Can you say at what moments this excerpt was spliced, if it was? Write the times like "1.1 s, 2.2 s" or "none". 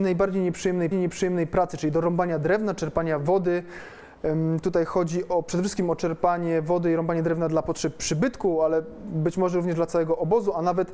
0.9 s